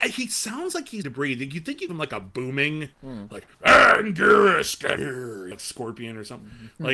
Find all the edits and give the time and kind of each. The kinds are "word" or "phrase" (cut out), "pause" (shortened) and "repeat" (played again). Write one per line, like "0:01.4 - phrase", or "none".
0:01.0 - word
0:01.9 - word
0:02.9 - pause
0:03.5 - pause
0:05.0 - word
0:05.5 - word